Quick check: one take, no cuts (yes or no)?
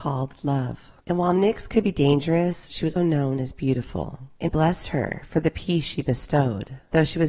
no